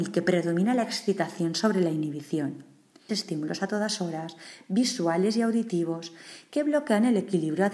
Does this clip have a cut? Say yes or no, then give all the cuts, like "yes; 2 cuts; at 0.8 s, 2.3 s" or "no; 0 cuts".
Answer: yes; 1 cut; at 3.1 s